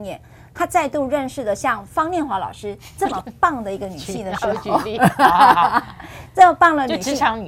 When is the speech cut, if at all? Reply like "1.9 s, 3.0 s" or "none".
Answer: none

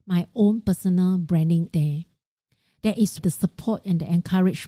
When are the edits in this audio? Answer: 1.7 s, 3.2 s

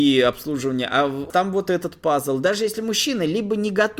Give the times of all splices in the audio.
1.3 s

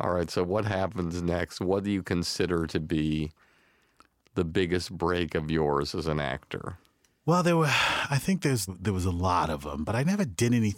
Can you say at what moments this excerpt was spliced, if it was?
8.7 s

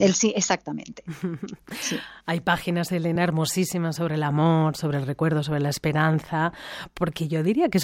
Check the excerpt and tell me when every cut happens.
none

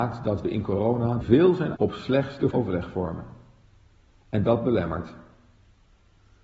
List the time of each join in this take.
1.2 s, 1.8 s, 2.5 s

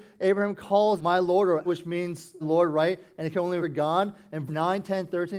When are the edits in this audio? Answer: 1.0 s, 1.7 s, 2.4 s, 3.6 s, 4.5 s

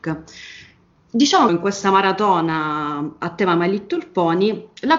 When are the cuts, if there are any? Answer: 1.5 s

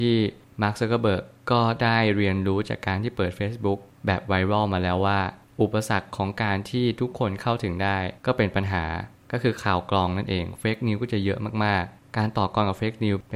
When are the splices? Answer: 8.2 s

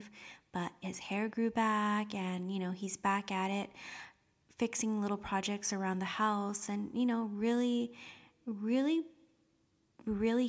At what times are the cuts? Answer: none

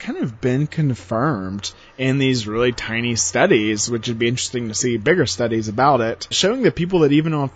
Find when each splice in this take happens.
6.3 s

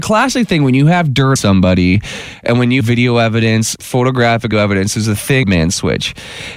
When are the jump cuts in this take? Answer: 1.4 s, 2.8 s, 3.8 s, 4.5 s, 5.4 s

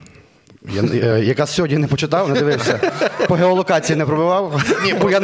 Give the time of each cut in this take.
none

